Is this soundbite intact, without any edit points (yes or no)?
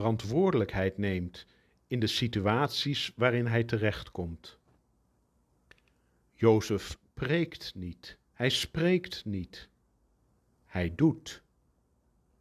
no